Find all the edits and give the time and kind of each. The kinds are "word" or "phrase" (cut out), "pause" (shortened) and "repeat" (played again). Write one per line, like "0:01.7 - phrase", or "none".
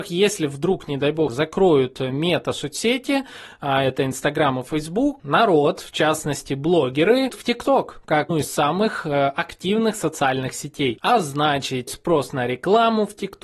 0:01.3 - word
0:05.2 - word
0:07.3 - word
0:08.3 - word
0:11.9 - word